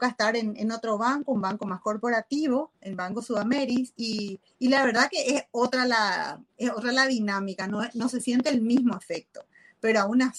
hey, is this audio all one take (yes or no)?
no